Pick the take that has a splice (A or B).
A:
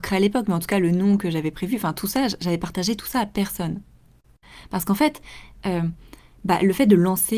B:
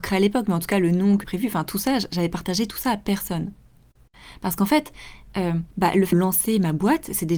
B